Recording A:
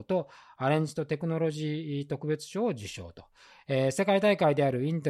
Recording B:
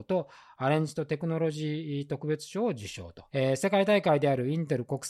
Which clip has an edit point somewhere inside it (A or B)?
B